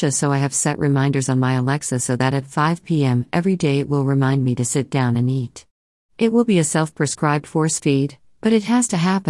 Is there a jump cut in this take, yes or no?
no